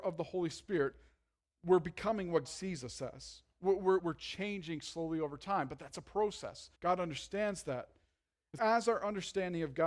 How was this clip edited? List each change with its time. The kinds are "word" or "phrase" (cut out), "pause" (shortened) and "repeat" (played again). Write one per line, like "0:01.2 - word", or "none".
0:02.4 - word
0:04.0 - word
0:06.7 - pause
0:08.6 - word